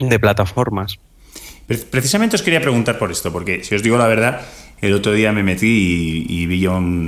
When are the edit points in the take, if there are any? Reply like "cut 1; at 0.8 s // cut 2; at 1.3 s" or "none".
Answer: none